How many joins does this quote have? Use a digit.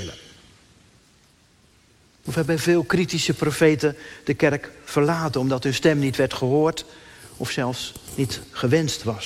0